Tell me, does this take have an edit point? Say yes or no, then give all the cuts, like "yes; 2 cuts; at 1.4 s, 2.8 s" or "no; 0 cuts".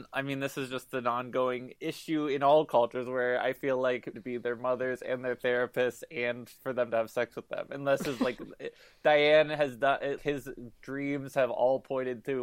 yes; 2 cuts; at 4.1 s, 10.2 s